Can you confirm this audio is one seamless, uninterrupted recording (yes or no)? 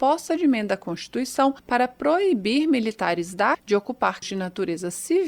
no